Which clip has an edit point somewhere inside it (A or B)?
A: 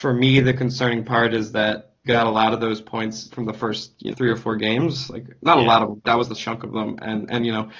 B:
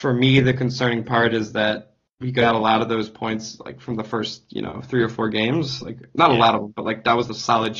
A